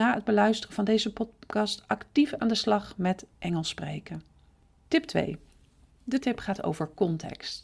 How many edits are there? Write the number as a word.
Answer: one